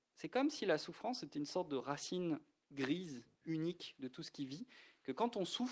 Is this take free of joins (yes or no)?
yes